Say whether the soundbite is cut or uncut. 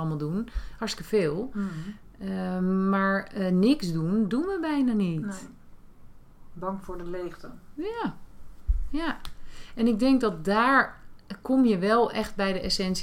uncut